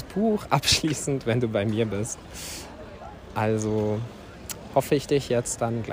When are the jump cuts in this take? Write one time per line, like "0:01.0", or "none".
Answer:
none

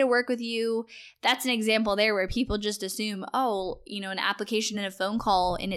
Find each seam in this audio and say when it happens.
none

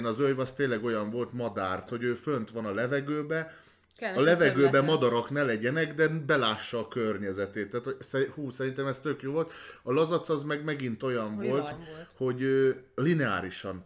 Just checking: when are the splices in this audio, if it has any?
0:01.9
0:04.0
0:11.7

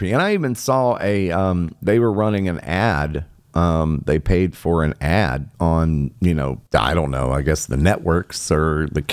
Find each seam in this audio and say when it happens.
0:05.5
0:06.7

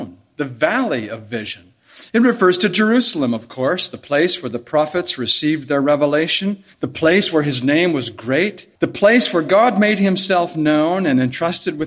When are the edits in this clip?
0:06.7
0:08.8

